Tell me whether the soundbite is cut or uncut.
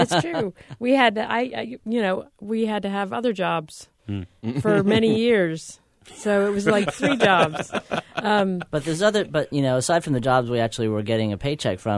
cut